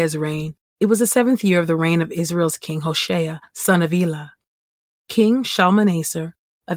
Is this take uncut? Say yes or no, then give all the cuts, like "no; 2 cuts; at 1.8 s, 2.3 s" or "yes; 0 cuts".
yes; 0 cuts